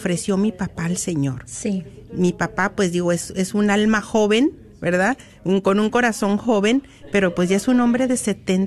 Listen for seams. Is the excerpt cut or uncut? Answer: uncut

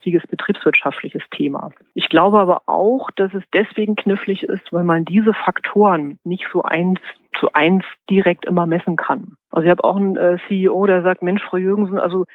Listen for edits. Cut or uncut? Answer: uncut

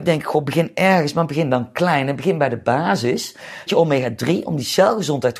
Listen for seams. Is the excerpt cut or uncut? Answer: cut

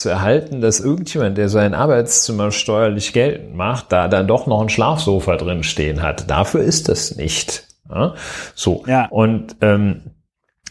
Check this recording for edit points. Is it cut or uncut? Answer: uncut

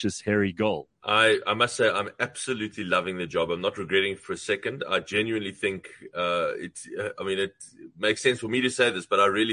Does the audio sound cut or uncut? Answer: cut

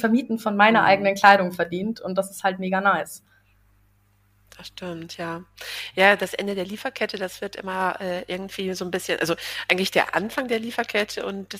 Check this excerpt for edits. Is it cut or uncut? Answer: uncut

